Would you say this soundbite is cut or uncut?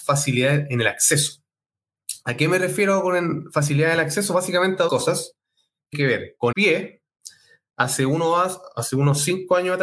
cut